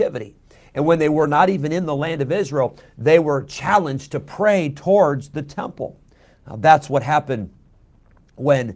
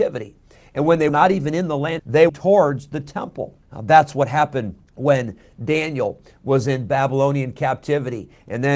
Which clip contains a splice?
second; 5 cuts; at 1.1 s, 2.0 s, 2.3 s, 3.6 s, 4.9 s

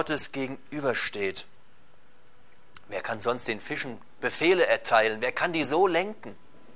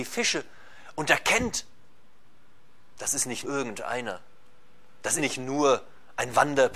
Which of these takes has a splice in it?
second; 3 cuts; at 2.9 s, 3.4 s, 5.2 s

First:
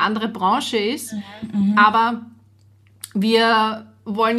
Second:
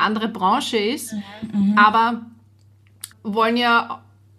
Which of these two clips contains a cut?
second; 1 cut; at 3.1 s

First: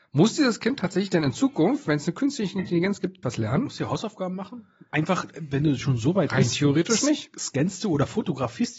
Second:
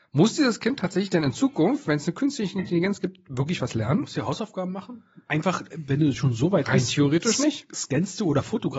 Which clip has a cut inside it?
first; 1 cut; at 3.2 s

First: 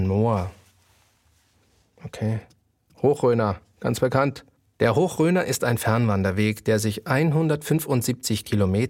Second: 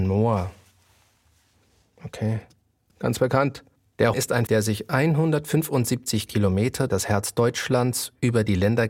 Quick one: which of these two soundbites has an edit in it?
second; 4 cuts; at 2.9 s, 4.1 s, 4.5 s, 6.9 s

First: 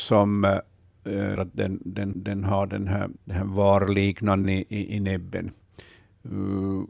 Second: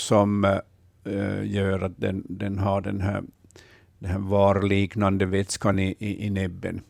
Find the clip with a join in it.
first; 4 cuts; at 1.4 s, 2.1 s, 3.2 s, 4.4 s

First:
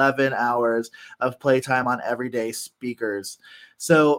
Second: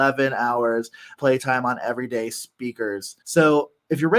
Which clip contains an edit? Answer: second; 2 cuts; at 1.2 s, 3.2 s

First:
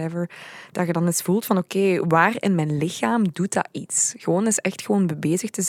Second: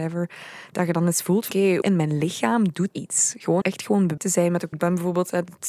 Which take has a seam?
second; 6 cuts; at 1.5 s, 1.8 s, 2.9 s, 3.6 s, 4.2 s, 4.7 s

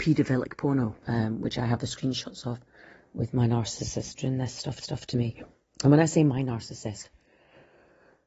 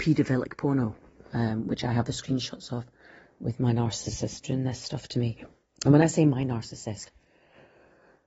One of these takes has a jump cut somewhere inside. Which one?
first; 2 cuts; at 1.0 s, 4.8 s

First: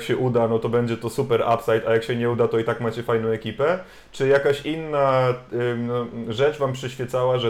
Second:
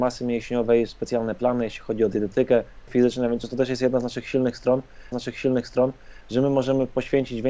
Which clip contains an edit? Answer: second; 3 cuts; at 2.9 s, 3.4 s, 5.1 s

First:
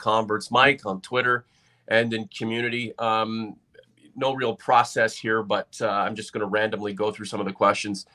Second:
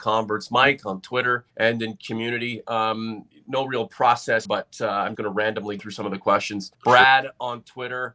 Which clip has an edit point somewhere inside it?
second; 6 cuts; at 1.5 s, 3.3 s, 4.4 s, 5.1 s, 5.8 s, 6.7 s

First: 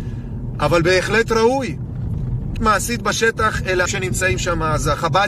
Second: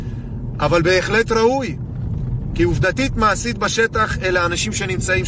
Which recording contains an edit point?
first; 2 cuts; at 2.6 s, 3.9 s

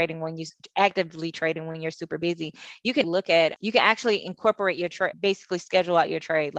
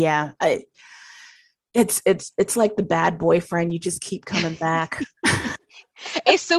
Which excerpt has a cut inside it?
first; 3 cuts; at 3.0 s, 3.6 s, 5.1 s

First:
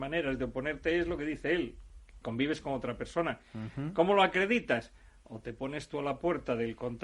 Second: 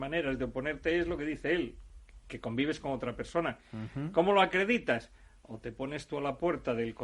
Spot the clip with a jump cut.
first; 1 cut; at 2.2 s

